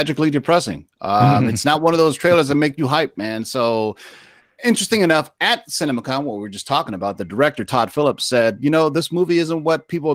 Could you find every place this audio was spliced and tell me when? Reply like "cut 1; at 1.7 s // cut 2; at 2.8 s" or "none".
none